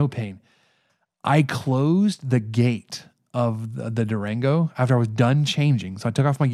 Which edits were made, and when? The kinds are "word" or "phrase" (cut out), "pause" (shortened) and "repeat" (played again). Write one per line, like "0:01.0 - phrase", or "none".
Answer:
none